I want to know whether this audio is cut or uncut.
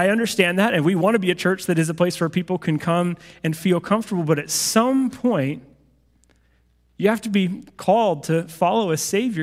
uncut